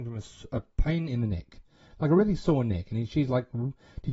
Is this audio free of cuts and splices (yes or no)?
yes